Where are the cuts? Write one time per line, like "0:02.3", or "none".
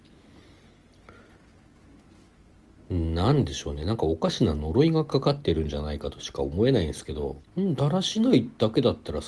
0:07.5